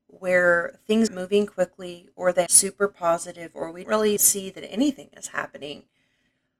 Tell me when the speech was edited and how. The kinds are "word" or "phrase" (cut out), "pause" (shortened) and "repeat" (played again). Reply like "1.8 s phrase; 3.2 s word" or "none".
1.1 s word; 2.5 s word; 3.8 s word; 4.2 s word